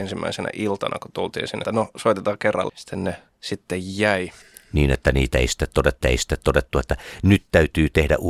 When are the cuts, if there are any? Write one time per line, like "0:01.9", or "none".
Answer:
0:01.6
0:02.7
0:06.0